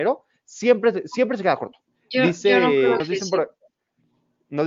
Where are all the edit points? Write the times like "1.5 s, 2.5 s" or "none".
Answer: 1.9 s, 3.0 s